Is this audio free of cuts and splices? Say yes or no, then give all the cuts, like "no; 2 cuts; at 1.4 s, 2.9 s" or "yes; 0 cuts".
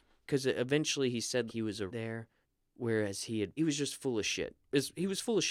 no; 4 cuts; at 1.5 s, 1.9 s, 2.4 s, 3.6 s